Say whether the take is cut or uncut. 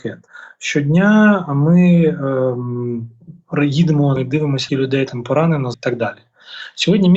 cut